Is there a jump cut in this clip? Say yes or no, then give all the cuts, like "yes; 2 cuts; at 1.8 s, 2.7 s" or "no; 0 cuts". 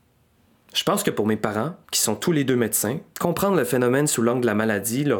yes; 2 cuts; at 1.8 s, 3.1 s